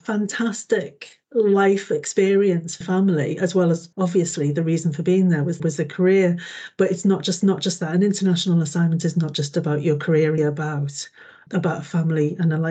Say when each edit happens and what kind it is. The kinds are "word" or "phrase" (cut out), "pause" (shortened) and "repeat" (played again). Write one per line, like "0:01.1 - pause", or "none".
0:01.2 - pause
0:02.8 - phrase
0:03.9 - pause
0:05.6 - word
0:07.4 - repeat
0:10.4 - phrase
0:11.5 - word